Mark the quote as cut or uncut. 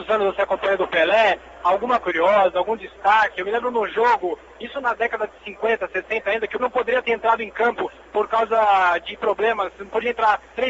cut